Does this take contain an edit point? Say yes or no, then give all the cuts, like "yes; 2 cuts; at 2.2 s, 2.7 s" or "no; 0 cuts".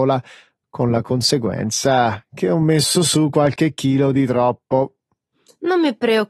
no; 0 cuts